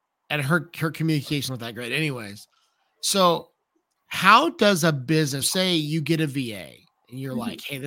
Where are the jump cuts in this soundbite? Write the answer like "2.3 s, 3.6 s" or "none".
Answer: 1.5 s, 5.4 s